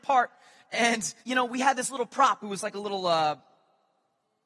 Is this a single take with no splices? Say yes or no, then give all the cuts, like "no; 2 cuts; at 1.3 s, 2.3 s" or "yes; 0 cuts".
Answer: no; 1 cut; at 1.2 s